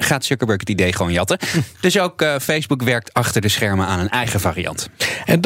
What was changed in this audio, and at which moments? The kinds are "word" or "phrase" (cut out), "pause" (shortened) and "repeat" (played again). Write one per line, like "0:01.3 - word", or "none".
none